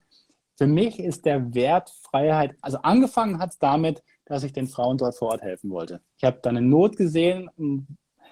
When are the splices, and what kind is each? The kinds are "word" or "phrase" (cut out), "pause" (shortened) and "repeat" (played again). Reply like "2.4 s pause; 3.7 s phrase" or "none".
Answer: 6.1 s pause